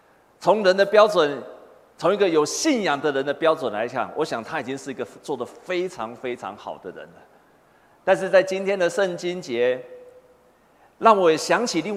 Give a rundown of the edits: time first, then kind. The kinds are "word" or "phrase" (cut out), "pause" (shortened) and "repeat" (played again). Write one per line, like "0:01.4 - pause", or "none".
none